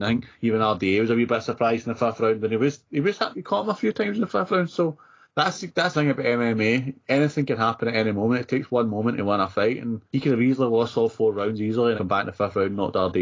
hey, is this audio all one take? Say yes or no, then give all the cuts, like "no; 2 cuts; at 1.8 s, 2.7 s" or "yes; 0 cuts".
no; 5 cuts; at 3.3 s, 5.2 s, 5.9 s, 10.1 s, 12.0 s